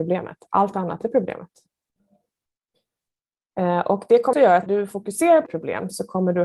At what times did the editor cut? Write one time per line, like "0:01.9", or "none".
0:01.0
0:04.3
0:04.7
0:05.5